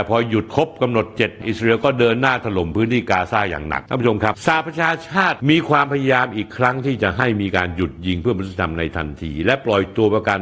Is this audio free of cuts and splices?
no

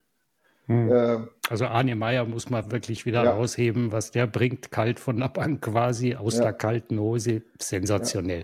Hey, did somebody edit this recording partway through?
no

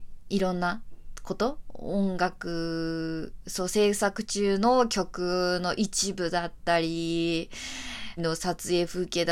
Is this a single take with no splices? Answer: no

